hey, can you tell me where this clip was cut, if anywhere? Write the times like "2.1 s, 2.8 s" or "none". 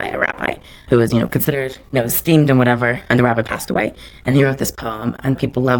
3.2 s